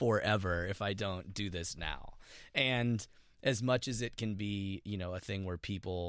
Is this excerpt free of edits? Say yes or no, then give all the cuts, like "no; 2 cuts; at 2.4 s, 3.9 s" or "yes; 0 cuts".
yes; 0 cuts